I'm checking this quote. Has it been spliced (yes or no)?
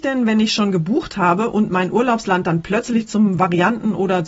no